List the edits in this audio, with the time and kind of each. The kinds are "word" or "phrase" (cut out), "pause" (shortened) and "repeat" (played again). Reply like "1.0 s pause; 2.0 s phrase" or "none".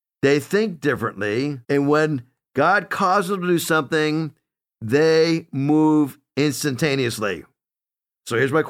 1.6 s pause